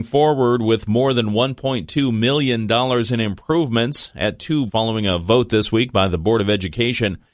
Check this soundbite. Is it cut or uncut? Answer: cut